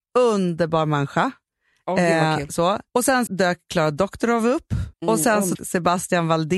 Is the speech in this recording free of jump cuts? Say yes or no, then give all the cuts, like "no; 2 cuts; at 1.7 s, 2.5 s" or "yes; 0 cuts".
no; 4 cuts; at 2.9 s, 3.3 s, 4.9 s, 5.5 s